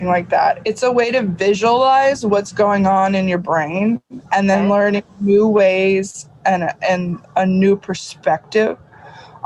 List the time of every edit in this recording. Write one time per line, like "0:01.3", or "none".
0:04.3
0:05.1
0:07.2